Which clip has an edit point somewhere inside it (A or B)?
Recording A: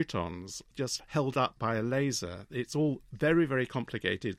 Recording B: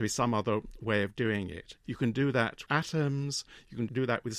B